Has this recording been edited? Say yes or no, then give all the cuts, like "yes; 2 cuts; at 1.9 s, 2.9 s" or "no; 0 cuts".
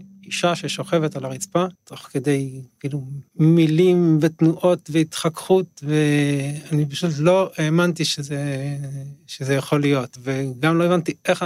yes; 2 cuts; at 1.7 s, 3.3 s